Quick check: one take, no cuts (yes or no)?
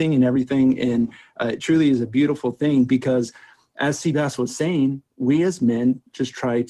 yes